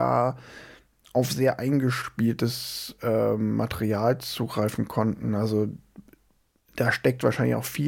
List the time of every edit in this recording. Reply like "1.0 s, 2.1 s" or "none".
none